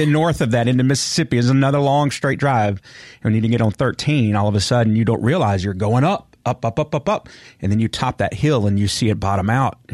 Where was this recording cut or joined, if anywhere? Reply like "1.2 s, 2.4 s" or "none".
none